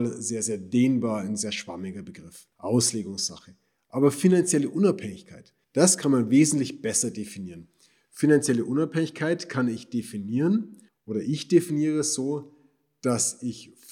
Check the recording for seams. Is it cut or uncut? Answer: cut